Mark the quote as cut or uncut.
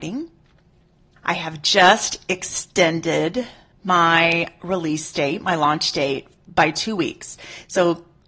uncut